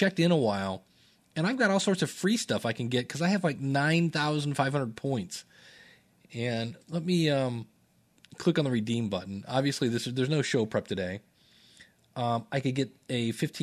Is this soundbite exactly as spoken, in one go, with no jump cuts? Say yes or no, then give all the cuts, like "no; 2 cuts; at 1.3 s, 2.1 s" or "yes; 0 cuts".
no; 1 cut; at 7.9 s